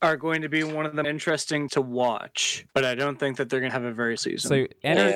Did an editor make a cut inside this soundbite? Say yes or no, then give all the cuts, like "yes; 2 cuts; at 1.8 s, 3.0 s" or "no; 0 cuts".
yes; 5 cuts; at 1.0 s, 1.7 s, 2.7 s, 3.7 s, 4.2 s